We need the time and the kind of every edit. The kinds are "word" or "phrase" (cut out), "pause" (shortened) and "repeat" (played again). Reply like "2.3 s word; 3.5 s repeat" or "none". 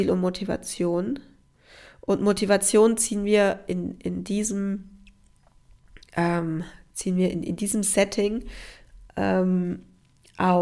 none